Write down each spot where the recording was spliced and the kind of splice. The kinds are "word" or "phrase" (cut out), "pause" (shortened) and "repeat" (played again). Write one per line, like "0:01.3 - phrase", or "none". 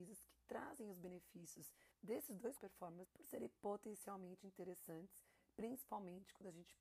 0:01.9 - pause
0:02.6 - phrase
0:03.0 - word